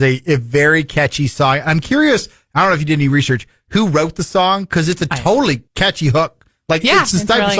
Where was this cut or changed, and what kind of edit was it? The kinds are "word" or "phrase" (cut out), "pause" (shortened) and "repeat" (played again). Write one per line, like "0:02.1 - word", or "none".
0:05.7 - pause